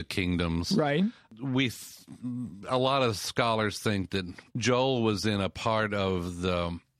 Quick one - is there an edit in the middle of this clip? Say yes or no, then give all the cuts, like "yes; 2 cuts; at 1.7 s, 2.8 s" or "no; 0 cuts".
yes; 1 cut; at 4.5 s